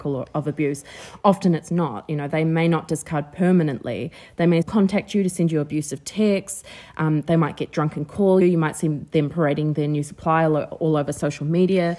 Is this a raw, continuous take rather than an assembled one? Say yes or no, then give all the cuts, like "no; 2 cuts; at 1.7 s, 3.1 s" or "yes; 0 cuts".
no; 2 cuts; at 4.6 s, 8.4 s